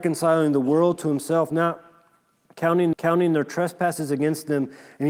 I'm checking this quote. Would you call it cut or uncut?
cut